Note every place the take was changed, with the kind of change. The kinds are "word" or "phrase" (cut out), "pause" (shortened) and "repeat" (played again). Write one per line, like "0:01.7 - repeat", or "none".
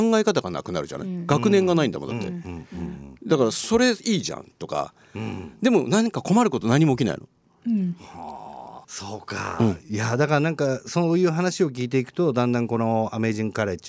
0:08.8 - pause